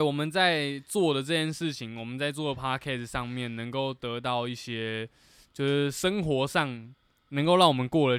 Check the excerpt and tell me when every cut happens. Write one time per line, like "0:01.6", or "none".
none